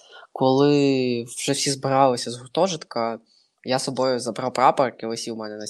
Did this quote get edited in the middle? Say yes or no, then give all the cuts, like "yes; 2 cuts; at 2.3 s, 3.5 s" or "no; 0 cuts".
no; 0 cuts